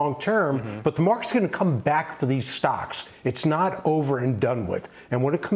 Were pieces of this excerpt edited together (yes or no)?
no